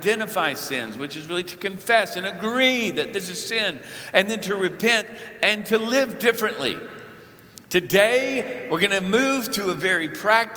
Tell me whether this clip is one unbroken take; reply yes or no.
no